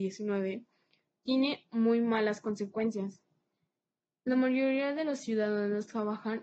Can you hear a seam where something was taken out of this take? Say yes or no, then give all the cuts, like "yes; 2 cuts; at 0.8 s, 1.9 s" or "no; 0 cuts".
no; 0 cuts